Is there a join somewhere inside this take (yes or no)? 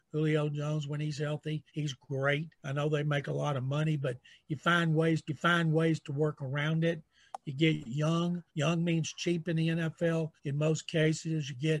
yes